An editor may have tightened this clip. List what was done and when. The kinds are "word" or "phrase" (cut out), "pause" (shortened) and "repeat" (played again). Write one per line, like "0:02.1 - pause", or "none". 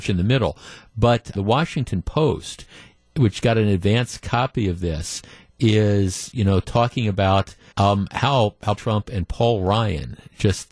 0:01.3 - word
0:07.7 - pause
0:08.8 - word